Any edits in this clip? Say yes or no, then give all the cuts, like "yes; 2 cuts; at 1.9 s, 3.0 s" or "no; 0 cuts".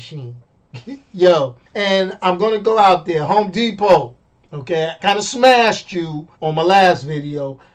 yes; 3 cuts; at 1.7 s, 5.0 s, 6.3 s